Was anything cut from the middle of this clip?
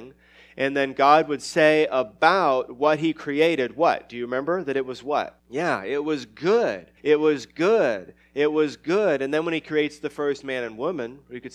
yes; 2 cuts; at 5.4 s, 7.0 s

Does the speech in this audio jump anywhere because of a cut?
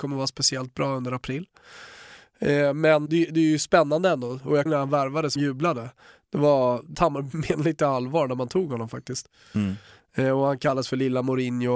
yes; 4 cuts; at 3.1 s, 4.7 s, 5.4 s, 6.9 s

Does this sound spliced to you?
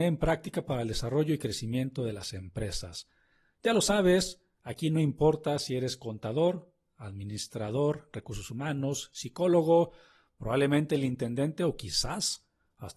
no; 0 cuts

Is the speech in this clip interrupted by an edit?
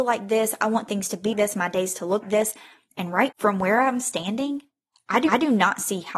yes; 4 cuts; at 1.3 s, 2.2 s, 3.3 s, 5.3 s

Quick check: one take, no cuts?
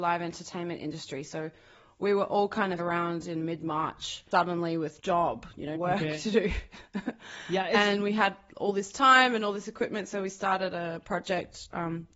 no; 4 cuts; at 2.8 s, 4.3 s, 5.0 s, 5.7 s

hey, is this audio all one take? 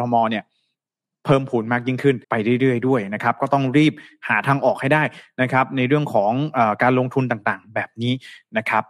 no; 1 cut; at 2.2 s

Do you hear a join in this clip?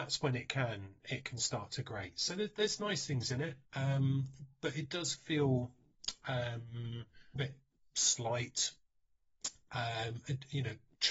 yes; 2 cuts; at 3.7 s, 7.4 s

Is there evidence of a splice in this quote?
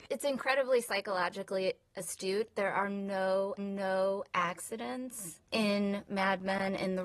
yes; 1 cut; at 3.6 s

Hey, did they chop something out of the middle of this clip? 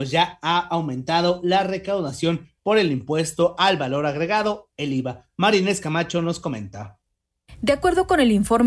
no; 0 cuts

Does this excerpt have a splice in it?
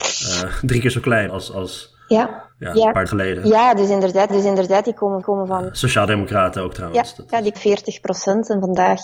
yes; 6 cuts; at 1.3 s, 2.5 s, 3.1 s, 4.3 s, 5.2 s, 7.5 s

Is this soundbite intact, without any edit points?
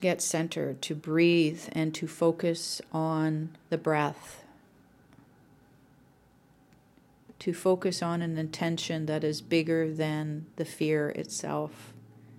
no; 2 cuts; at 3.6 s, 10.5 s

